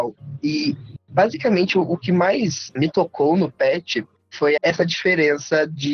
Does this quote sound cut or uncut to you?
cut